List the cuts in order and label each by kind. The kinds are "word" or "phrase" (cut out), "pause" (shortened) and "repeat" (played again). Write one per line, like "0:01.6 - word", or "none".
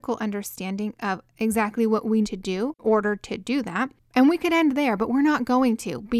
0:02.2 - word
0:02.8 - word